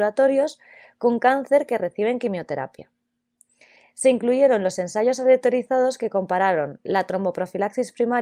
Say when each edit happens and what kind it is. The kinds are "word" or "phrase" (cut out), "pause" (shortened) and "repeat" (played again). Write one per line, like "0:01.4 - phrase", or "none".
none